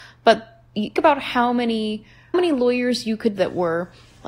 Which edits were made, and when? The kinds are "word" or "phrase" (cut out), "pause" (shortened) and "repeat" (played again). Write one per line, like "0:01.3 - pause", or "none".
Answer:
0:01.0 - word
0:02.3 - word
0:03.4 - word